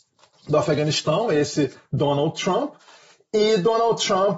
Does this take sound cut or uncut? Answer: uncut